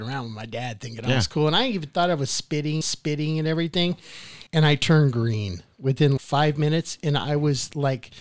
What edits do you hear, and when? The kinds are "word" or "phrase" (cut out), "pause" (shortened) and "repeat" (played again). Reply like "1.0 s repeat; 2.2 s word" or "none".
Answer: 2.8 s repeat; 4.5 s pause; 6.2 s word